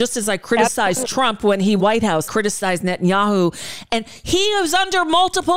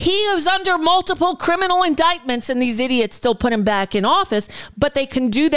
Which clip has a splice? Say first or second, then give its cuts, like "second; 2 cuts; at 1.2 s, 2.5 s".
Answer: first; 2 cuts; at 1.8 s, 2.2 s